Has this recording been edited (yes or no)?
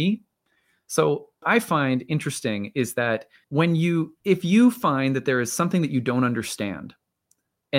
yes